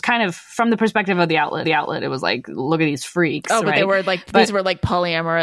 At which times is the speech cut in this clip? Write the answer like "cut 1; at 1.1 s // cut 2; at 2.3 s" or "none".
cut 1; at 1.6 s